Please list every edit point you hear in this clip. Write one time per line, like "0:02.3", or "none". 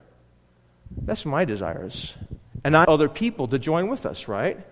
0:02.8